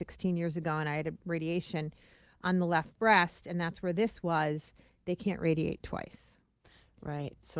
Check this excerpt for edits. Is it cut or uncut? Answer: uncut